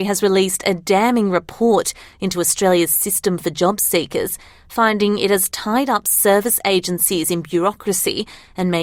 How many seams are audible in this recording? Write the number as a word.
zero